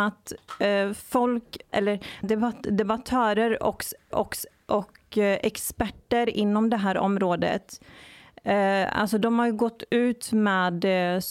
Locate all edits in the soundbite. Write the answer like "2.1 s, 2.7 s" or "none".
1.7 s, 2.2 s, 4.1 s